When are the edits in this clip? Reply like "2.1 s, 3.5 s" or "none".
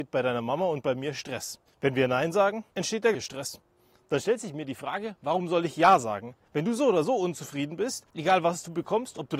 1.7 s, 2.7 s, 3.1 s, 8.1 s